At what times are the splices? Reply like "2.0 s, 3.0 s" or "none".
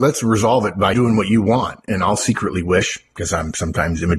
0.9 s

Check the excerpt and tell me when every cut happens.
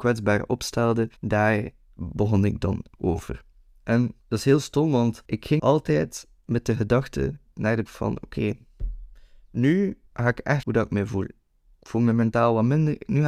1.2 s, 4.2 s, 5.3 s, 5.6 s, 7.9 s, 10.1 s, 10.6 s

